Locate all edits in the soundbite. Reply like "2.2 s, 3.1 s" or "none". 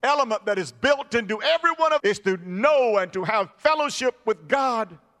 2.0 s, 3.5 s